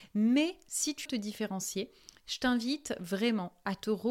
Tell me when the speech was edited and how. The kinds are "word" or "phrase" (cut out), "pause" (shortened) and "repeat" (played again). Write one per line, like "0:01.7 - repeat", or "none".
0:01.1 - word